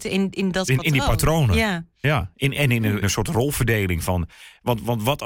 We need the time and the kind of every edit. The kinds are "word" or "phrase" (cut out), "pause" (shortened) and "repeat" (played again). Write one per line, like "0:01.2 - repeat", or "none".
0:03.0 - phrase